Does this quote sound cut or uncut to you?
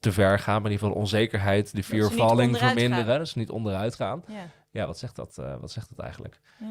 uncut